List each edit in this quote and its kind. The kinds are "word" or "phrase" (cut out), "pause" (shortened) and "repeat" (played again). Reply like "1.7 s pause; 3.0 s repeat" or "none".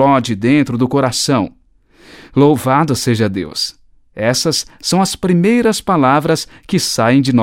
none